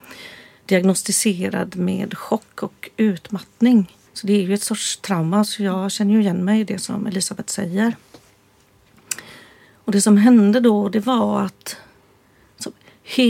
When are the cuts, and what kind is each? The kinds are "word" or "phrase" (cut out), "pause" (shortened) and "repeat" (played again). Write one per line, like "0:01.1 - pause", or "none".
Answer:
0:04.1 - pause